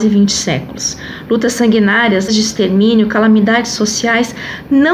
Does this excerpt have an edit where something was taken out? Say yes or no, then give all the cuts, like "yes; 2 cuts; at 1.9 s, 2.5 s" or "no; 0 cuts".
yes; 1 cut; at 2.3 s